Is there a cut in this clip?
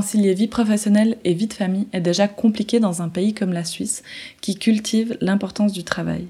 no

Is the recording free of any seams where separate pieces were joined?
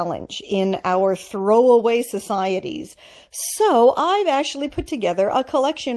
yes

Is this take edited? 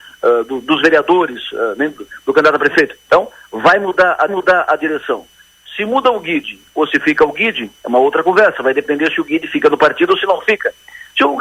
yes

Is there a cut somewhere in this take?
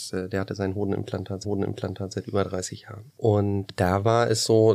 yes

